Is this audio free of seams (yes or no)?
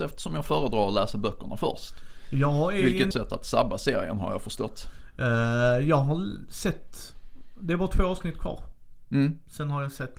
no